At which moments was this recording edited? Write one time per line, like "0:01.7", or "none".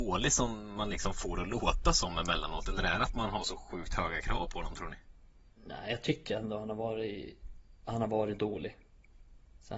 none